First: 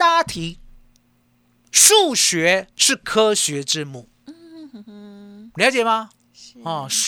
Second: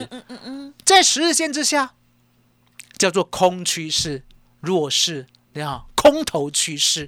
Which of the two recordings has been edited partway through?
first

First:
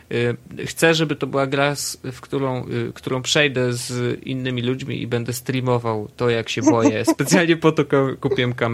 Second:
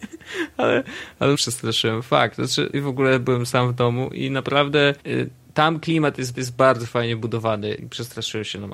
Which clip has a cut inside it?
second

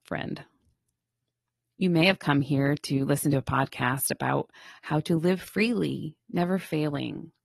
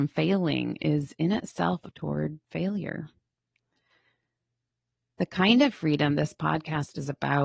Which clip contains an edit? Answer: second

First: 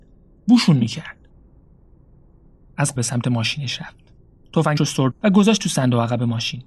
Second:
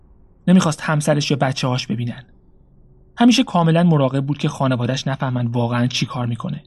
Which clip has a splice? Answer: first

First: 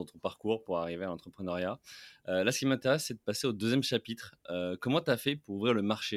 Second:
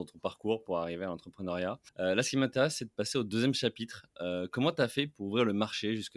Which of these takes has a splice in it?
second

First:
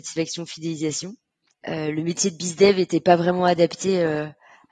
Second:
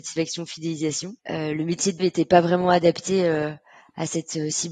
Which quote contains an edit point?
second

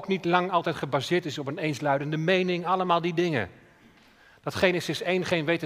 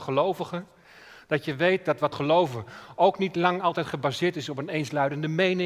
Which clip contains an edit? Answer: second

